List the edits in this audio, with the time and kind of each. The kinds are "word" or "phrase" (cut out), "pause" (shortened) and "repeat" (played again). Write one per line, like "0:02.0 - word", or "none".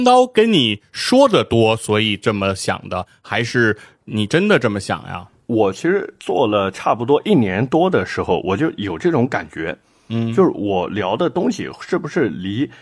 none

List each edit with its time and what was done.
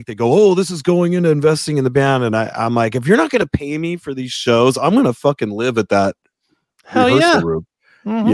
none

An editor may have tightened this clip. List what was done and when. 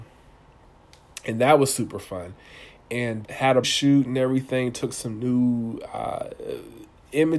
0:03.2 - word
0:03.6 - word

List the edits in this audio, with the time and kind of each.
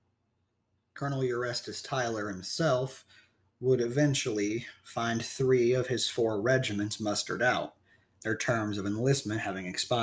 none

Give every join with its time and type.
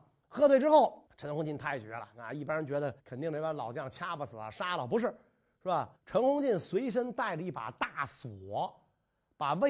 0:01.1 - pause
0:03.0 - pause
0:06.0 - pause

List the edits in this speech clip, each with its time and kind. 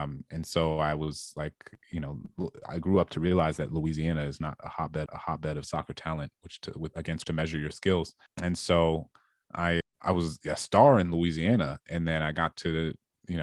0:05.1 - repeat
0:07.2 - word
0:08.3 - pause
0:09.8 - word

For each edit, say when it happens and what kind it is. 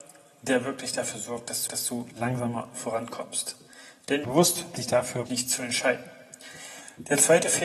0:01.7 - repeat
0:04.2 - phrase
0:04.8 - word
0:05.3 - phrase

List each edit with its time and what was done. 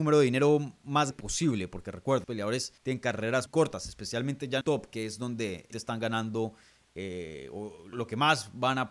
0:01.1 - word
0:02.2 - word
0:02.8 - pause
0:03.5 - word
0:04.6 - word
0:05.7 - word
0:07.9 - word

